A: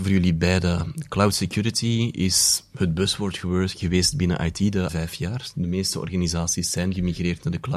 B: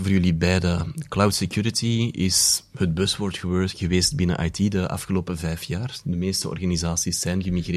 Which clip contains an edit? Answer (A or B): A